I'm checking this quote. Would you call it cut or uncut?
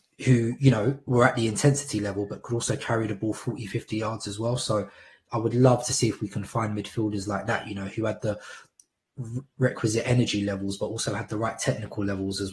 uncut